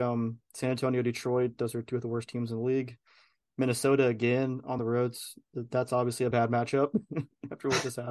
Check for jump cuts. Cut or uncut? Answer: uncut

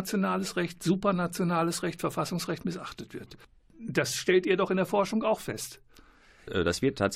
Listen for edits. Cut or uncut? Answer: uncut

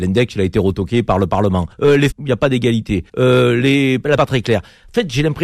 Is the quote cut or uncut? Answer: cut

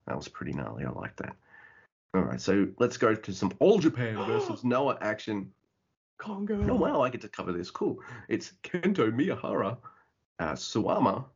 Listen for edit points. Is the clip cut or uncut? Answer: uncut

